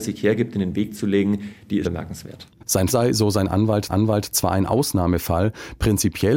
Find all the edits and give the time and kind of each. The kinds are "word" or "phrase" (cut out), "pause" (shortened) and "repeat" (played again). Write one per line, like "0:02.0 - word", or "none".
0:01.8 - word
0:02.9 - word
0:03.9 - repeat